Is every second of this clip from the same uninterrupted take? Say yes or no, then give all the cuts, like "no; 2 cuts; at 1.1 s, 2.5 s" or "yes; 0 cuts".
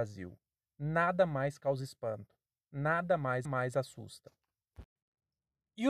no; 1 cut; at 3.5 s